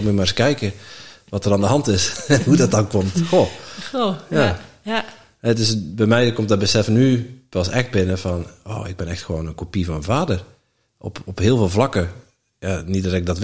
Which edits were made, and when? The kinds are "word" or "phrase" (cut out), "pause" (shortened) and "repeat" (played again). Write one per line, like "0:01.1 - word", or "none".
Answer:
none